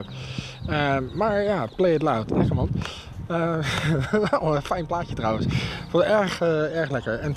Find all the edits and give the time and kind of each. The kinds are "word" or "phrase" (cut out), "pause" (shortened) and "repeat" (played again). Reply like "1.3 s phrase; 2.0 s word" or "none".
none